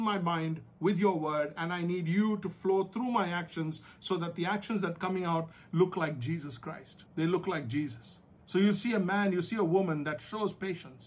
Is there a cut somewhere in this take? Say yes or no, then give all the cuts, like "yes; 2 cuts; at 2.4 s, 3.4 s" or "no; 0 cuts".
yes; 2 cuts; at 7.1 s, 8.4 s